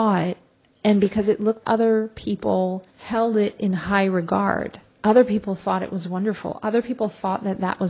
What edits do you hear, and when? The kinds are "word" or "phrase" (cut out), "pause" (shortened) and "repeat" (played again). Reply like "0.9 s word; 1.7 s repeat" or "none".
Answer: 1.6 s word; 2.9 s pause; 4.9 s pause